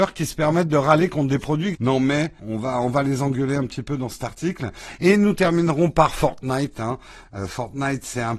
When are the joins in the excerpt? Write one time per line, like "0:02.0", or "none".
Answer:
0:01.7
0:02.4

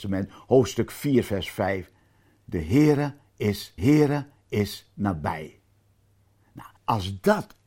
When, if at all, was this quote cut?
0:03.8
0:06.8

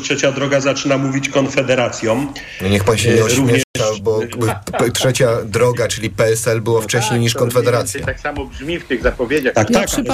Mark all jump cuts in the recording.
none

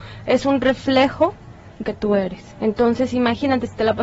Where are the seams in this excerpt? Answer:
0:01.8
0:02.5

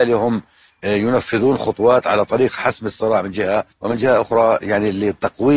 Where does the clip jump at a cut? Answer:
0:03.7

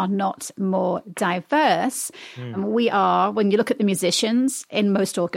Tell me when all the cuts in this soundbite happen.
none

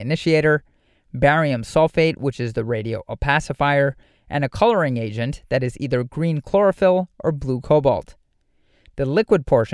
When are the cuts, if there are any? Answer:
none

